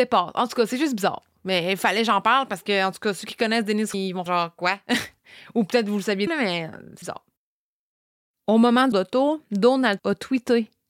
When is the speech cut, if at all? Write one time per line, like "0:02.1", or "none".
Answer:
0:03.9
0:04.3
0:06.3
0:07.0
0:08.9
0:10.0